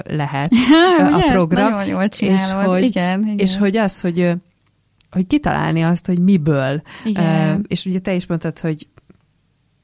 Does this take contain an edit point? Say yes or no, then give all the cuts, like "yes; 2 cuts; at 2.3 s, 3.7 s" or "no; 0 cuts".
no; 0 cuts